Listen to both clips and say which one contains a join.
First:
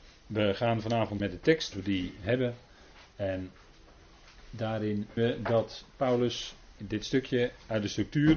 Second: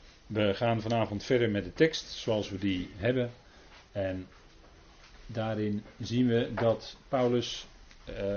first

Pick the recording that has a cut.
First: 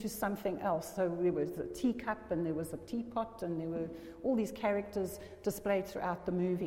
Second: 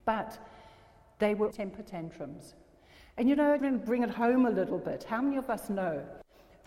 second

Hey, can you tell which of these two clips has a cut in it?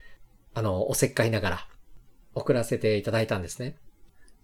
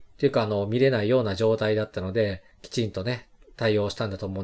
second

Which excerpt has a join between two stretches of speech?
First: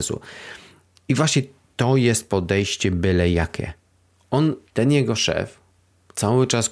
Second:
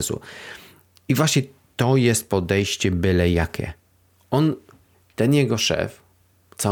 first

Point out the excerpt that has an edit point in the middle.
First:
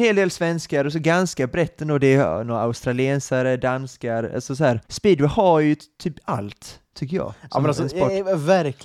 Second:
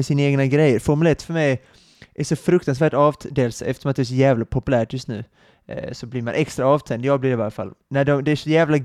first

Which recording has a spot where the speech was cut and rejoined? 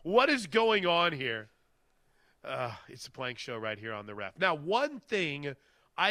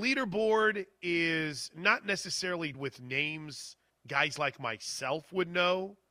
second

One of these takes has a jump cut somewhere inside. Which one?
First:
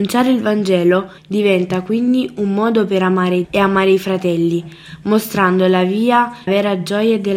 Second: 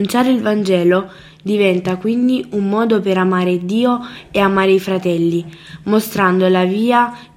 first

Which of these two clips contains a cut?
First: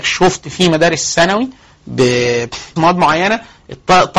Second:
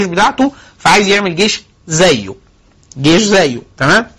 first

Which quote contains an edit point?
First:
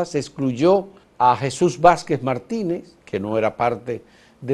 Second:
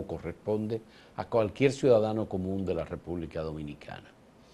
first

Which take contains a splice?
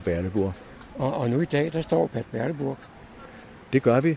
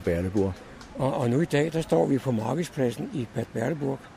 first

